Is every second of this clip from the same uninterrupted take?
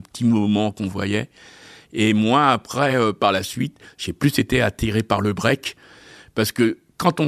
yes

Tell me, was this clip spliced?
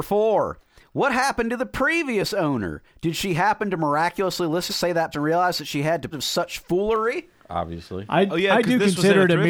yes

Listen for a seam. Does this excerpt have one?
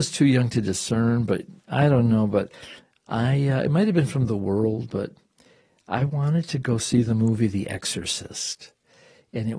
no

